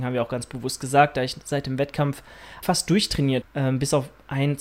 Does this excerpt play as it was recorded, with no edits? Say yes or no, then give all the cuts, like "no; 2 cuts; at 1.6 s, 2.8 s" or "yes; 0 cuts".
no; 2 cuts; at 2.6 s, 3.4 s